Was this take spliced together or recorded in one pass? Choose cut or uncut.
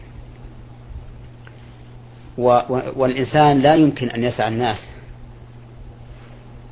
uncut